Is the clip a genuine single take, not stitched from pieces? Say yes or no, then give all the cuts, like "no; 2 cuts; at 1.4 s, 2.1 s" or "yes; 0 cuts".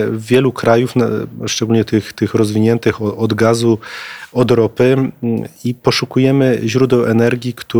yes; 0 cuts